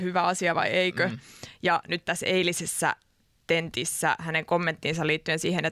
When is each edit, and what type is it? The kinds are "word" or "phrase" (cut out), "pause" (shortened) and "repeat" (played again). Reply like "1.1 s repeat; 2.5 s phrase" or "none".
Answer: 2.0 s word